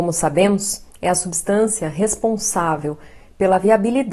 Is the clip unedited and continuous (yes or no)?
yes